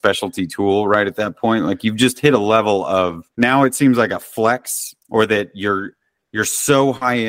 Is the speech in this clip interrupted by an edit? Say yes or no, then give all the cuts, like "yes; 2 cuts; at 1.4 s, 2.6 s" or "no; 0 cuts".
yes; 2 cuts; at 3.3 s, 5.0 s